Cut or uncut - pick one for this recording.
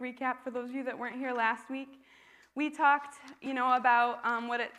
uncut